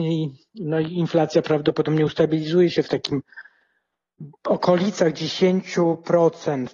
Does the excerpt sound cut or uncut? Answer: uncut